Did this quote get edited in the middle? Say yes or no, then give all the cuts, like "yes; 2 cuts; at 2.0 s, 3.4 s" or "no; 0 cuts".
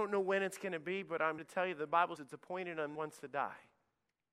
yes; 3 cuts; at 1.4 s, 2.2 s, 3.0 s